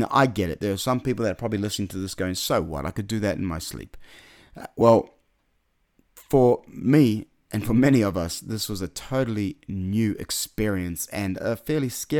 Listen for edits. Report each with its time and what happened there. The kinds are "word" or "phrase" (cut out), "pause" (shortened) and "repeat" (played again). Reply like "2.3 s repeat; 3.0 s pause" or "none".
none